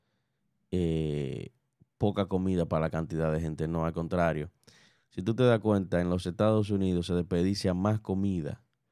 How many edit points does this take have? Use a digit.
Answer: 0